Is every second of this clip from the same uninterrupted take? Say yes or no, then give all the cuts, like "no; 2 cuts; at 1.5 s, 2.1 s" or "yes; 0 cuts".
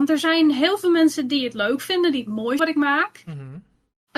no; 1 cut; at 2.6 s